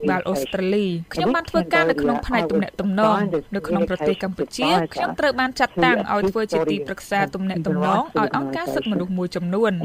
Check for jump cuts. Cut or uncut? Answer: cut